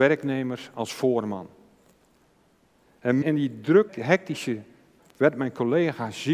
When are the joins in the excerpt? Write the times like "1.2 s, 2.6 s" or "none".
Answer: 3.2 s, 3.9 s, 5.0 s

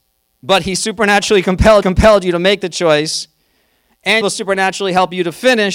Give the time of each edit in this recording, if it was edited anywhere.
1.8 s, 4.2 s

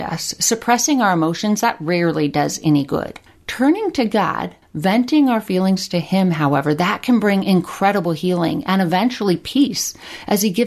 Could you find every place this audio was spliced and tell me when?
3.3 s, 4.6 s

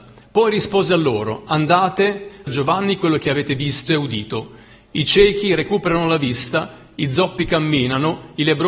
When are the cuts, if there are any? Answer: 2.5 s

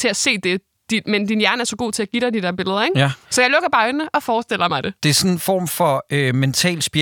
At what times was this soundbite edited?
none

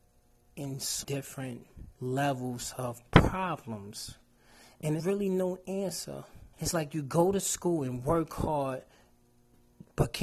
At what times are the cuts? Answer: 1.0 s, 1.9 s, 5.0 s, 6.5 s

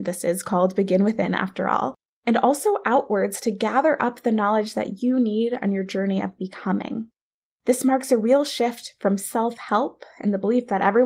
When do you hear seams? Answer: none

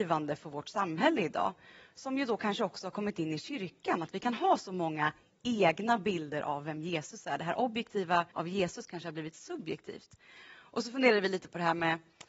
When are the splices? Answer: 8.3 s

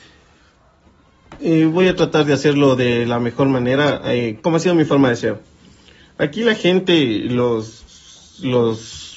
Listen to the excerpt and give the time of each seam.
4.4 s

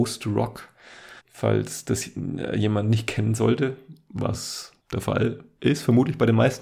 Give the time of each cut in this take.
1.2 s, 4.8 s

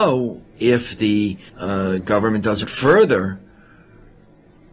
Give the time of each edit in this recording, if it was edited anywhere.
1.5 s, 2.6 s

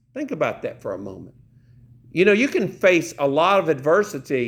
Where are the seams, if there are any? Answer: none

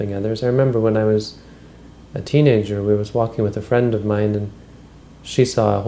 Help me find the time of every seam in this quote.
none

